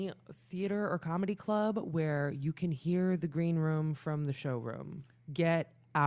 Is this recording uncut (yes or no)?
yes